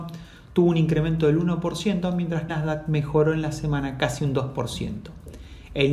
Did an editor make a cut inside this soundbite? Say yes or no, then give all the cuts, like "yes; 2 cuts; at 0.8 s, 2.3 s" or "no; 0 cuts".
yes; 1 cut; at 2.5 s